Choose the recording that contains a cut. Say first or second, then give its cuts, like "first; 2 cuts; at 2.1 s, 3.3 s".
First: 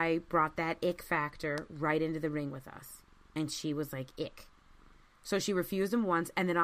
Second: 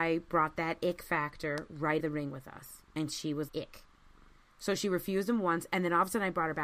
second; 3 cuts; at 2.0 s, 2.9 s, 3.5 s